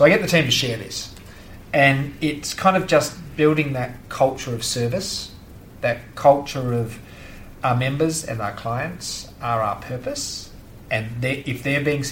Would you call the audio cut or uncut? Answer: cut